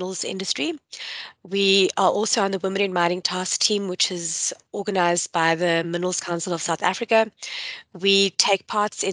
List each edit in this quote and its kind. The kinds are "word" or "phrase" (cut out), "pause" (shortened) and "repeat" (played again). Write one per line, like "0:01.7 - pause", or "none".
none